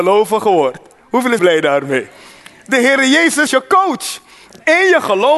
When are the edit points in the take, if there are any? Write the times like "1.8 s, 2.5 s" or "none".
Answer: 1.4 s, 3.5 s